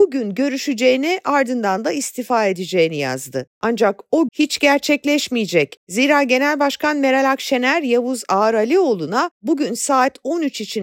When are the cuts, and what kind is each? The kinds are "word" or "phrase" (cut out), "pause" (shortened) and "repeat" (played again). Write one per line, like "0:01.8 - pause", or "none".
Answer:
0:04.3 - word